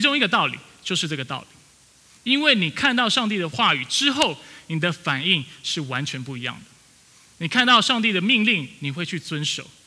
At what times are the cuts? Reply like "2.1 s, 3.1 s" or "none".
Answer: none